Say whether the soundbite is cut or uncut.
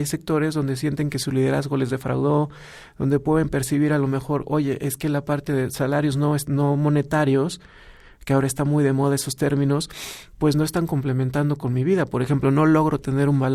uncut